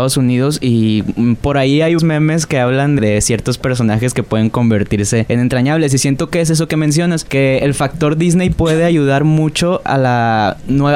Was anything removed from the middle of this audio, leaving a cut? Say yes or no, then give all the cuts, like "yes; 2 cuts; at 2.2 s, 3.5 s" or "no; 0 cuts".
yes; 2 cuts; at 2.0 s, 3.0 s